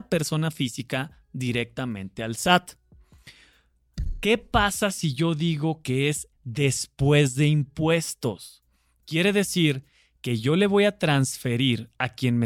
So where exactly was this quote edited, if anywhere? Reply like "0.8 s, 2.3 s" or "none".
6.3 s